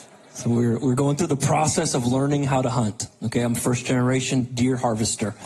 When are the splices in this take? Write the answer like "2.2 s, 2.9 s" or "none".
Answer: none